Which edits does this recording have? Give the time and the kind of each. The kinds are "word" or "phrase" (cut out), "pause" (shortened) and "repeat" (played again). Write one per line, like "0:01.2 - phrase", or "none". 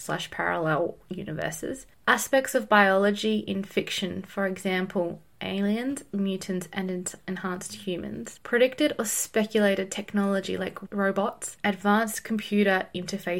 none